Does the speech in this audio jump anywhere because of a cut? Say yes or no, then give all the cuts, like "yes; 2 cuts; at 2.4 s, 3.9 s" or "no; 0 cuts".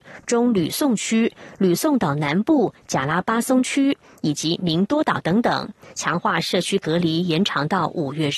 no; 0 cuts